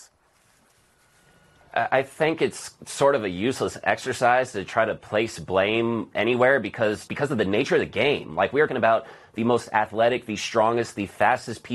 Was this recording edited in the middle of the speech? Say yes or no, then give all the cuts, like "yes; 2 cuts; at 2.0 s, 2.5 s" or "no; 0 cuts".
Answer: yes; 2 cuts; at 7.1 s, 8.7 s